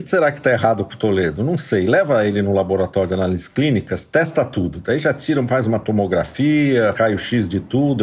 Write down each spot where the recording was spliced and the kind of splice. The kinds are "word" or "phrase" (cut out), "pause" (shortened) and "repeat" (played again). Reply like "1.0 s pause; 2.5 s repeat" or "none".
6.9 s word